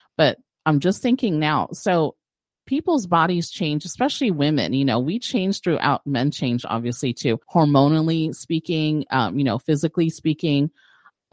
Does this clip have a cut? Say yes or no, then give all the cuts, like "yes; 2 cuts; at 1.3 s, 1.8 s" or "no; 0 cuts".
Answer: yes; 1 cut; at 7.4 s